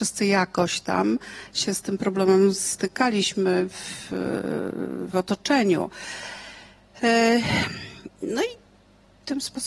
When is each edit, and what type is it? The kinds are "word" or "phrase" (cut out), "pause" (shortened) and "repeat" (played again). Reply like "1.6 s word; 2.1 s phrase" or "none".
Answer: none